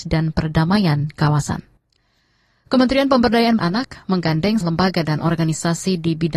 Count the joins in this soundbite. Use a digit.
2